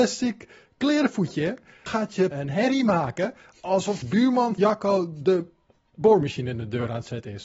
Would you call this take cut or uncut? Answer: cut